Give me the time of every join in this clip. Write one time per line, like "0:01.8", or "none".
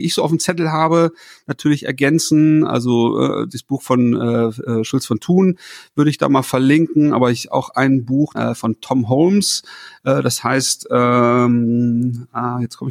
0:03.5
0:08.3